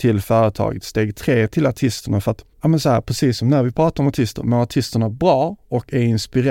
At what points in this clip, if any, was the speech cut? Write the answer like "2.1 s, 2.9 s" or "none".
2.5 s